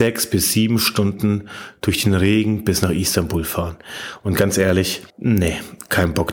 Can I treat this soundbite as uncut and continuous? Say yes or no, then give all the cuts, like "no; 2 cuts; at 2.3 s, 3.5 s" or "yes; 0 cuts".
no; 1 cut; at 5.1 s